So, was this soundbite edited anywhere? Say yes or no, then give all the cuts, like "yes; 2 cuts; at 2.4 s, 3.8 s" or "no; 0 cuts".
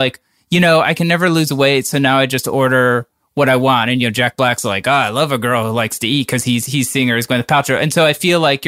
no; 0 cuts